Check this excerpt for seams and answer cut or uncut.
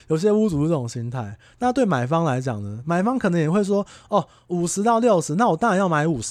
uncut